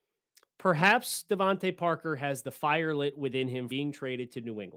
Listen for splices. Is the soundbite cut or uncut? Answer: cut